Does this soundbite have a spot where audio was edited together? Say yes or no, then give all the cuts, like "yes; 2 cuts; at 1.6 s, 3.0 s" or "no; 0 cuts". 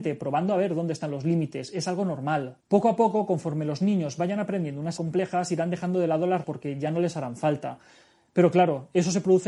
yes; 3 cuts; at 2.6 s, 5.0 s, 6.4 s